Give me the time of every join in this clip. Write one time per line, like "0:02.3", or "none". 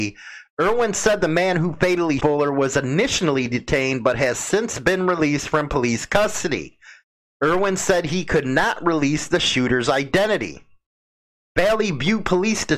0:02.2